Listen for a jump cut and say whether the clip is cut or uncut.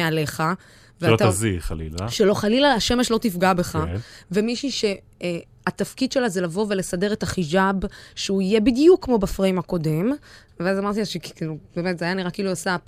uncut